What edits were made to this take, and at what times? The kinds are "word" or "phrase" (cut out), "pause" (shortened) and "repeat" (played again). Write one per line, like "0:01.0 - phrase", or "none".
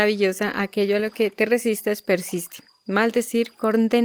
none